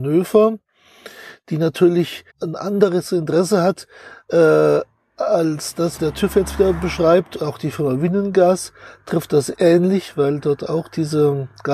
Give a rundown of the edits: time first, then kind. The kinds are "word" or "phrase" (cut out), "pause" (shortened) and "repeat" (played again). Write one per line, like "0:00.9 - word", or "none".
0:02.3 - word
0:06.0 - word
0:09.5 - word